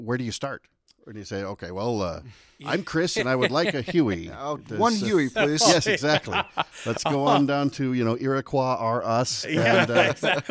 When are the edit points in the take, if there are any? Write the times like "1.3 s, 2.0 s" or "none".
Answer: none